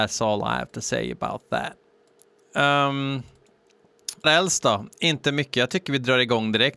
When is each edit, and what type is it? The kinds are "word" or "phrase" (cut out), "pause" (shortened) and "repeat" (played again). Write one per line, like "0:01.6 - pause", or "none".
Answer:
0:04.2 - word